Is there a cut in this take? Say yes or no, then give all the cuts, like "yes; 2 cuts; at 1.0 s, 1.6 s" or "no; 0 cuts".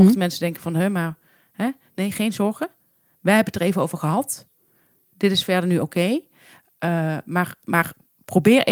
no; 0 cuts